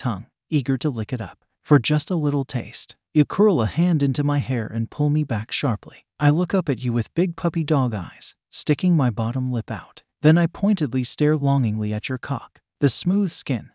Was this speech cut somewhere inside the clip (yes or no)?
no